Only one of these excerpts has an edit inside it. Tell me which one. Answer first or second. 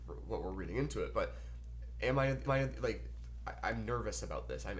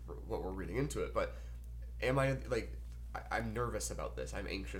first